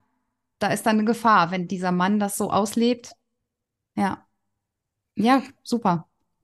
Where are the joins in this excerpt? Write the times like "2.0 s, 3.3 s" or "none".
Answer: none